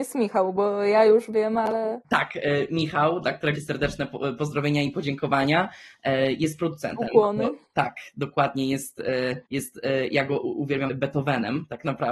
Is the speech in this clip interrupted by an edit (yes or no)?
yes